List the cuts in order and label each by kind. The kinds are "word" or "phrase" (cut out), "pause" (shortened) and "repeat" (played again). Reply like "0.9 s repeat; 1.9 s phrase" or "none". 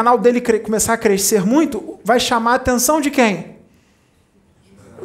none